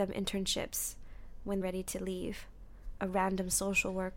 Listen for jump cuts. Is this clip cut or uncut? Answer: cut